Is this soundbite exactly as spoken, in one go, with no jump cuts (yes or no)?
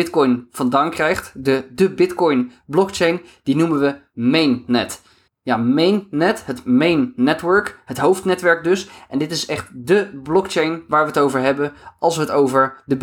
no